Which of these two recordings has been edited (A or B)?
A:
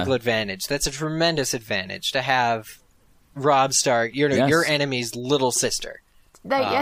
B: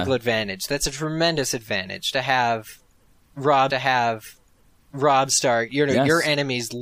B